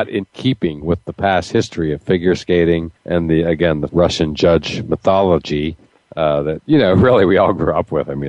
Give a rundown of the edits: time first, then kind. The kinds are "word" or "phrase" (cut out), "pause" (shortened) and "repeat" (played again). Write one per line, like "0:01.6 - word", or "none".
0:03.0 - pause
0:03.9 - word
0:05.9 - pause